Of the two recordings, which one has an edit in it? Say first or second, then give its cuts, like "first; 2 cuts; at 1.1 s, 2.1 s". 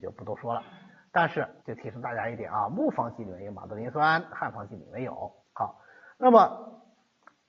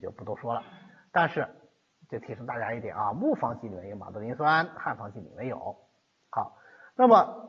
first; 2 cuts; at 1.6 s, 5.4 s